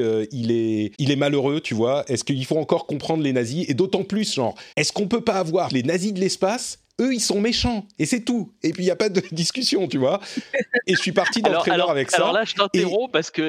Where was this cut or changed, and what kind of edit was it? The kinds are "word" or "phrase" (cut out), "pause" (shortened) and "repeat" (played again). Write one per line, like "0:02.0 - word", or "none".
0:00.9 - pause
0:04.7 - pause
0:05.7 - word